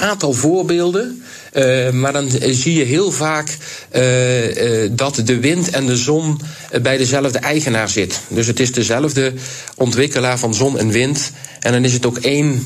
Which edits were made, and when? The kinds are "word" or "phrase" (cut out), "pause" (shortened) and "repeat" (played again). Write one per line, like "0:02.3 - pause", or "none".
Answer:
none

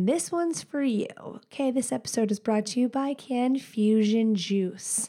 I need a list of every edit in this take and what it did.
none

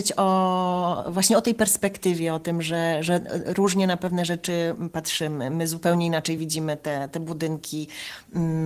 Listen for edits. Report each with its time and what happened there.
none

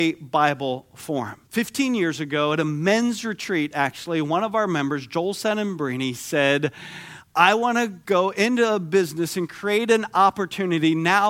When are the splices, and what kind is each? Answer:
0:01.5 - pause

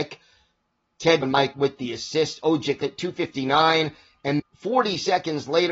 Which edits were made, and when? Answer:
0:01.2 - word
0:01.5 - word
0:02.8 - word
0:04.4 - word

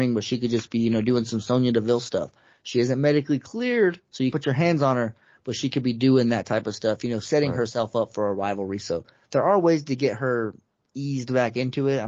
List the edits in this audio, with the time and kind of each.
0:04.3 - word

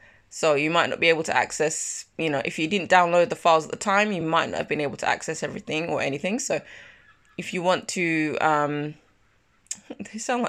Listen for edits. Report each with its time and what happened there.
none

